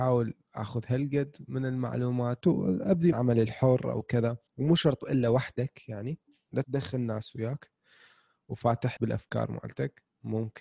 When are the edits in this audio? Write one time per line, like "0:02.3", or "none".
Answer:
0:02.4
0:03.1
0:04.5
0:06.6
0:09.0